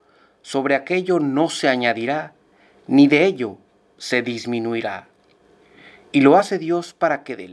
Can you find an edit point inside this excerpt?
no; 0 cuts

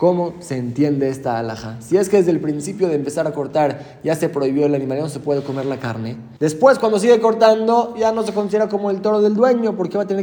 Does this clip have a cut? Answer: yes; 1 cut; at 6.4 s

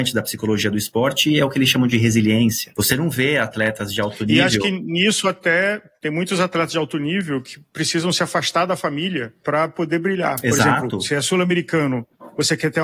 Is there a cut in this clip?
no; 0 cuts

